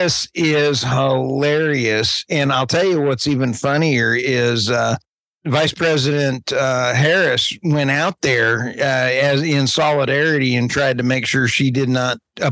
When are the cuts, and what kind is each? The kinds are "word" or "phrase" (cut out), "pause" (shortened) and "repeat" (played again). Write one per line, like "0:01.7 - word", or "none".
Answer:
none